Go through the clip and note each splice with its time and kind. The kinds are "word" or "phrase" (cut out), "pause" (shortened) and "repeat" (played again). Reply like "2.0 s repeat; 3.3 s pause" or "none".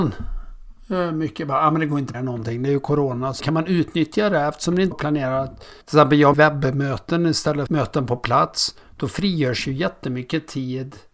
2.1 s word; 3.4 s word; 4.9 s word; 5.8 s pause; 6.3 s word; 7.7 s word